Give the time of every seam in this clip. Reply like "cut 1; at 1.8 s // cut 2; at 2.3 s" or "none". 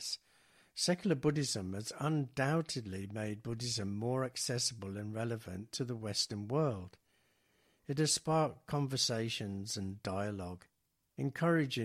none